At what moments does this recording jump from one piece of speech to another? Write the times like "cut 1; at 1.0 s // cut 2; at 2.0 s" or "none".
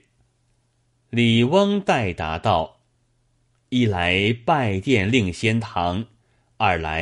none